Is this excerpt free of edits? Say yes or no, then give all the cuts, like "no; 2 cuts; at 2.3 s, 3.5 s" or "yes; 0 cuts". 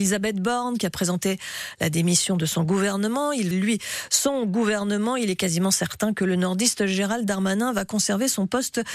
no; 1 cut; at 3.5 s